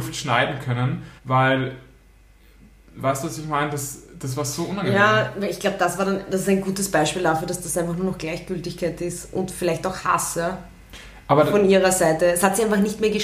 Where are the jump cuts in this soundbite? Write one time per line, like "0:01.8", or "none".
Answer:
0:01.2